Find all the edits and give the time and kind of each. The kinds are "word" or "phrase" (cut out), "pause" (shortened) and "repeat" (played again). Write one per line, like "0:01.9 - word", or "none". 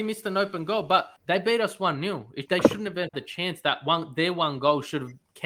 0:01.2 - pause
0:02.5 - word
0:03.1 - word